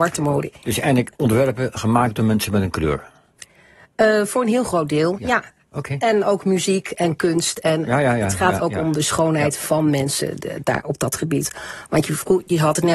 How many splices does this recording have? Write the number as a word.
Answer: zero